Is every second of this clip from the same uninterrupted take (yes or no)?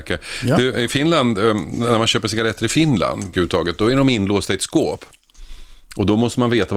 no